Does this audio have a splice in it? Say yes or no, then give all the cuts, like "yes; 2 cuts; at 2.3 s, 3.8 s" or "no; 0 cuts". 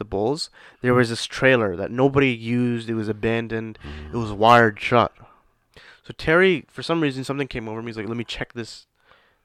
no; 0 cuts